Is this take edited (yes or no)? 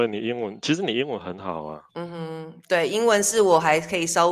yes